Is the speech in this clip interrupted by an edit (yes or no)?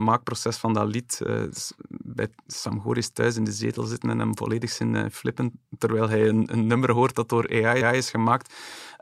yes